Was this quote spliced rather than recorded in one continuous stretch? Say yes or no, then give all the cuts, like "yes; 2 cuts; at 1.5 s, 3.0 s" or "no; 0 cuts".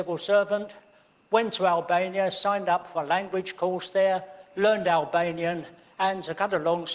no; 0 cuts